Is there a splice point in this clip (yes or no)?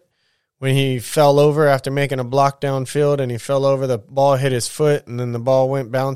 no